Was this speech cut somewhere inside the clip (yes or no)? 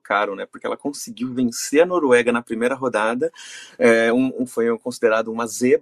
no